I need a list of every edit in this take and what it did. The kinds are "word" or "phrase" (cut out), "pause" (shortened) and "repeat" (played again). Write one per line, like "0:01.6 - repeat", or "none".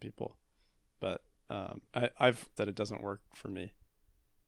0:01.9 - pause
0:02.6 - word